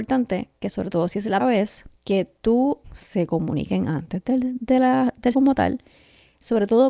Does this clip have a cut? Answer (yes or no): yes